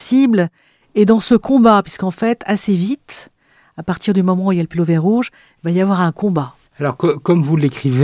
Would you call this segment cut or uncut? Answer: uncut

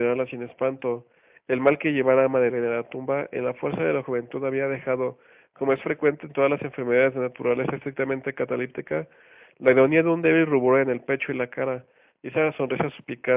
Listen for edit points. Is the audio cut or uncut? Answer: uncut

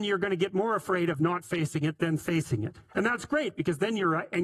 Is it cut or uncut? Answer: cut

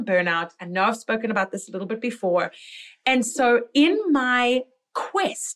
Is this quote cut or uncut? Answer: uncut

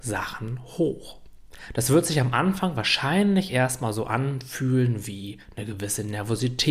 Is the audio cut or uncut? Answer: uncut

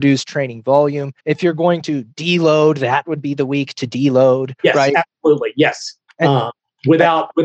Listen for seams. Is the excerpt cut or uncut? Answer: cut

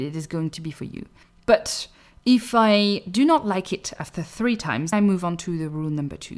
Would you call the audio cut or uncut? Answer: cut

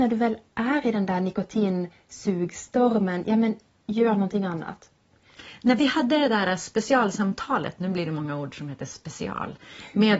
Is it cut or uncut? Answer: uncut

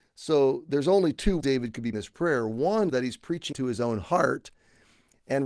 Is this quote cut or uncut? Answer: cut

